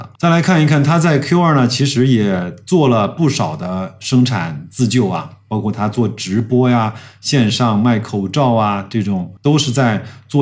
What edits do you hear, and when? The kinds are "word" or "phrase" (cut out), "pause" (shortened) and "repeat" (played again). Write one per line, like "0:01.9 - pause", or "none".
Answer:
none

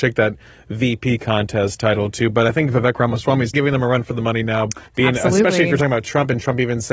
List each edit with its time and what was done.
0:03.5 - word
0:04.9 - pause

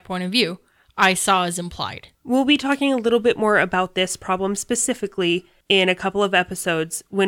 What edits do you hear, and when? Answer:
0:02.1 - pause

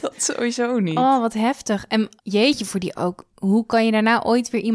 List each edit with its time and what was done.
0:02.2 - pause
0:03.0 - word

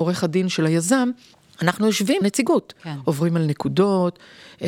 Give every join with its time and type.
0:01.3 - pause
0:02.2 - word

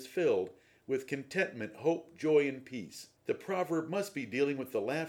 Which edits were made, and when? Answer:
0:03.2 - pause

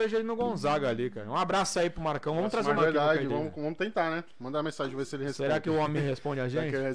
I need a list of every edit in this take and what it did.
0:02.8 - word
0:03.3 - word

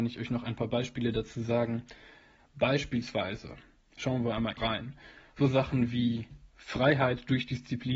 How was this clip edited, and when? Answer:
0:04.6 - word

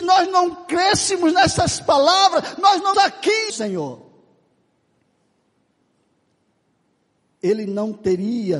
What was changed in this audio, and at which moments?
0:02.9 - word
0:03.5 - phrase

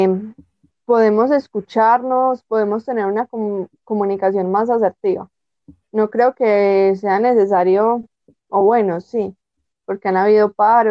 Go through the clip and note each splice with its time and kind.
none

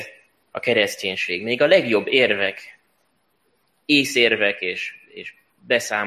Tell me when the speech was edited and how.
none

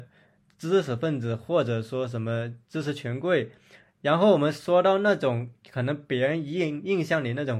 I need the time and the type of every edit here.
0:02.6 - pause

